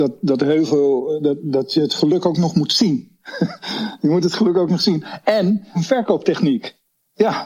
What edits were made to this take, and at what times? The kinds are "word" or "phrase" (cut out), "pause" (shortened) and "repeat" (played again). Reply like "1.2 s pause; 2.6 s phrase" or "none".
1.4 s word; 5.7 s phrase